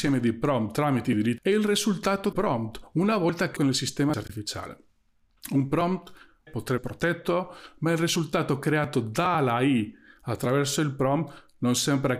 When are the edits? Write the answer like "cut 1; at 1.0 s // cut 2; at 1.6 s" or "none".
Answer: cut 1; at 1.4 s // cut 2; at 2.3 s // cut 3; at 3.6 s // cut 4; at 4.1 s // cut 5; at 6.5 s // cut 6; at 6.8 s